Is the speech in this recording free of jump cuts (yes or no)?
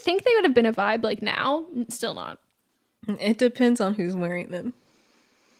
yes